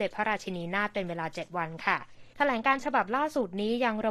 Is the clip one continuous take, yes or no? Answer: no